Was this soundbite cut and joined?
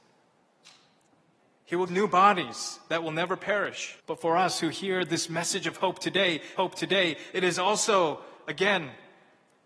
yes; 3 cuts; at 1.9 s, 4.0 s, 6.6 s

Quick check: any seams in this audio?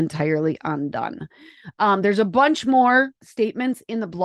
yes; 1 cut; at 3.2 s

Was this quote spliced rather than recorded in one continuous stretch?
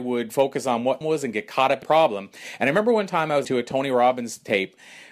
yes; 3 cuts; at 1.0 s, 1.8 s, 3.4 s

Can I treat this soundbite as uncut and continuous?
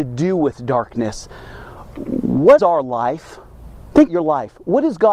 no; 2 cuts; at 2.6 s, 4.1 s

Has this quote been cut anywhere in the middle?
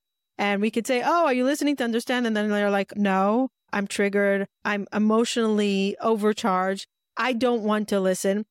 no; 0 cuts

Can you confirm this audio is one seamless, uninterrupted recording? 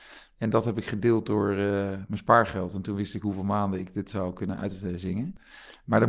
yes; 0 cuts

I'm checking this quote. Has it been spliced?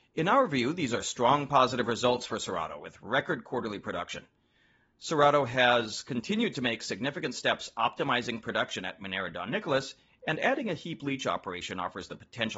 no; 0 cuts

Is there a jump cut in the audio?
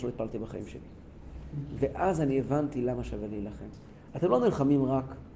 no; 0 cuts

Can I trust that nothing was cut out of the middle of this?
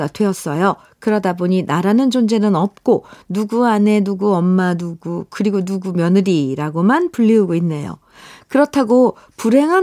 yes; 0 cuts

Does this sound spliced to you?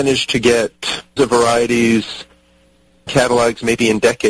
yes; 2 cuts; at 1.2 s, 3.1 s

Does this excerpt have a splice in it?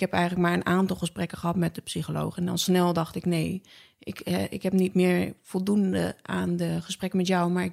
no; 0 cuts

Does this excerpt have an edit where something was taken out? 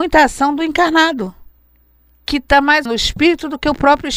yes; 1 cut; at 2.9 s

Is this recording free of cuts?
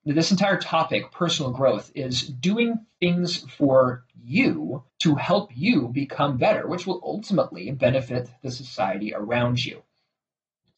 no; 1 cut; at 4.9 s

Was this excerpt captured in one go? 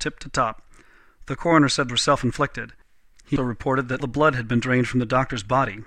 no; 3 cuts; at 1.9 s, 3.4 s, 4.0 s

